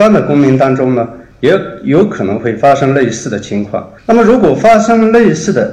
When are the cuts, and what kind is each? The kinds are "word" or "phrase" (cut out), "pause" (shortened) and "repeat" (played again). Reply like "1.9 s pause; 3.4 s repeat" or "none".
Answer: 4.0 s pause